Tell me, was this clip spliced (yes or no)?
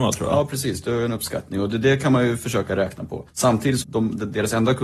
yes